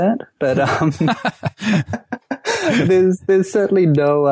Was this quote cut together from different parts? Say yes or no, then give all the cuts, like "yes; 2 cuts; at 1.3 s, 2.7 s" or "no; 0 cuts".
no; 0 cuts